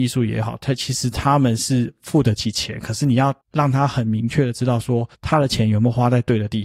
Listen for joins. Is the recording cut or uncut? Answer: cut